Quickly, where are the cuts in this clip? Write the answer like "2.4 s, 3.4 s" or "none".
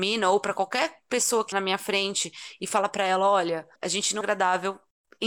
1.5 s, 3.8 s, 4.2 s

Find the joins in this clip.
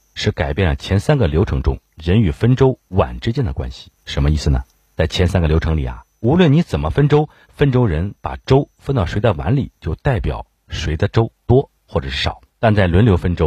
4.0 s, 4.7 s, 11.4 s, 12.5 s

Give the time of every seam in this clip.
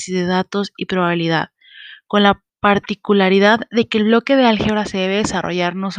2.5 s

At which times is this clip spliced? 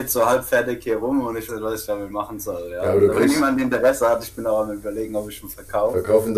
1.5 s

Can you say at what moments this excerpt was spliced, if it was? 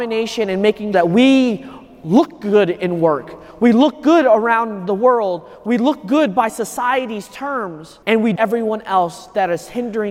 0.9 s, 8.0 s, 8.4 s

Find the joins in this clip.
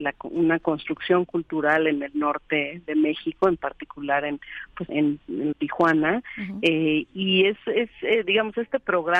4.9 s, 5.5 s

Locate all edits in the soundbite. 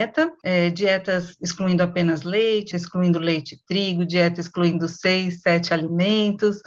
2.7 s

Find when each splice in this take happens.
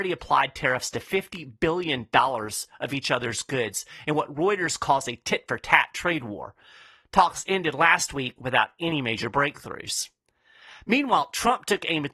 none

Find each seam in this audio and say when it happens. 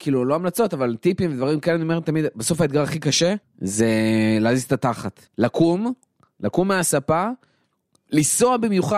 3.4 s, 5.3 s

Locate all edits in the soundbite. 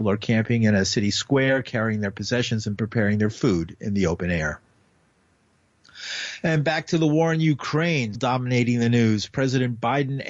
2.8 s, 8.1 s

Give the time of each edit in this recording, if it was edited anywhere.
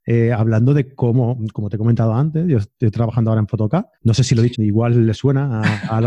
4.0 s, 4.5 s

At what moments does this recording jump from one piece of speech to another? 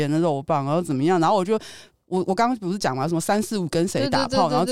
none

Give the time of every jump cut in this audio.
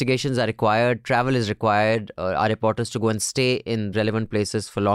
3.9 s

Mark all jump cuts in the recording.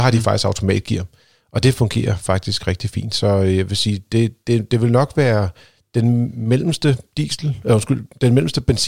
none

